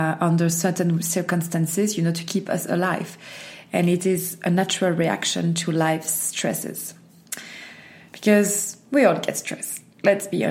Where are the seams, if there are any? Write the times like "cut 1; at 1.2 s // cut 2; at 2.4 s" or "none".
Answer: none